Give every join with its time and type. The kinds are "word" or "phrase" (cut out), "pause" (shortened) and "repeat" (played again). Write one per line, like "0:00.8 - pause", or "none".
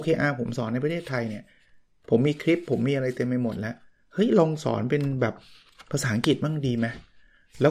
none